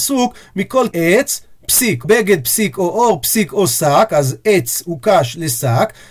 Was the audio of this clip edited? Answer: yes; 2 cuts; at 0.9 s, 2.0 s

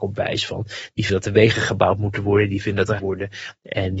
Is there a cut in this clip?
yes; 2 cuts; at 1.1 s, 3.0 s

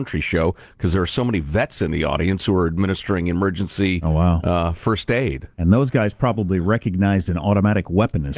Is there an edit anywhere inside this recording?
yes; 1 cut; at 5.5 s

